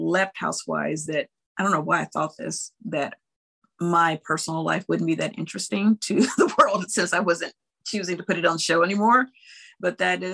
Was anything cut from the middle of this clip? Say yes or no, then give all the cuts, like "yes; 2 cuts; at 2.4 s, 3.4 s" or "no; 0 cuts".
no; 0 cuts